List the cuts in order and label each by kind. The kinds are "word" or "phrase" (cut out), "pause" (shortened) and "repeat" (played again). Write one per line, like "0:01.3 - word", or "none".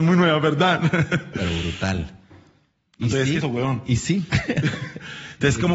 0:01.3 - word
0:03.4 - phrase